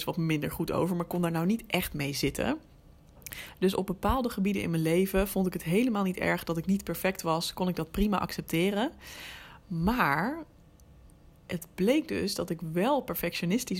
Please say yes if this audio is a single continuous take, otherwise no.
yes